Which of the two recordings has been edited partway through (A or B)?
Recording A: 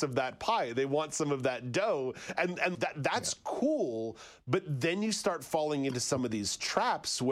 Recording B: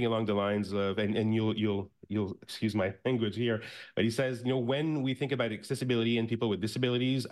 A